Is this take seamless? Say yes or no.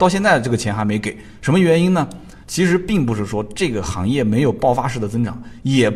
no